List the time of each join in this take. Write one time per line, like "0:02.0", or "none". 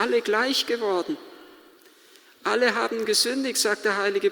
none